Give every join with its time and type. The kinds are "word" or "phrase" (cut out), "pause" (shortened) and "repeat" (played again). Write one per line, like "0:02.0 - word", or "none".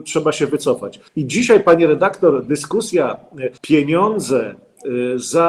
0:01.1 - pause
0:03.6 - pause